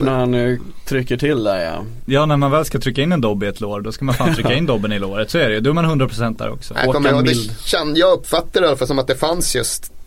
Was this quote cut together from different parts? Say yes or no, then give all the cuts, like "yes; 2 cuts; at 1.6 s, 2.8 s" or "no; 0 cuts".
no; 0 cuts